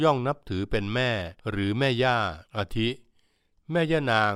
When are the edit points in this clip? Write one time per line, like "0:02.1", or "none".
0:01.4
0:02.5